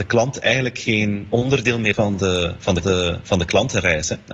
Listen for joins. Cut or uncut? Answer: cut